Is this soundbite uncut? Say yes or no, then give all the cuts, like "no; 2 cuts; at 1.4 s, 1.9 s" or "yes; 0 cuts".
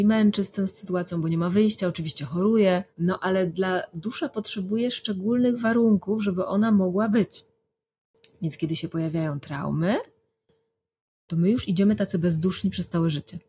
no; 1 cut; at 2.9 s